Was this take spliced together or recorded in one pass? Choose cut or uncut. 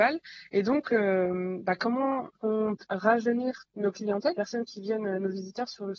cut